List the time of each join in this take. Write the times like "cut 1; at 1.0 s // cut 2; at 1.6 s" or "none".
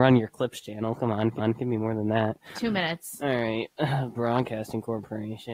cut 1; at 1.4 s // cut 2; at 2.5 s // cut 3; at 4.1 s